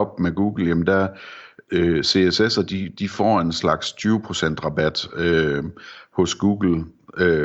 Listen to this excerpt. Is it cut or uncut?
uncut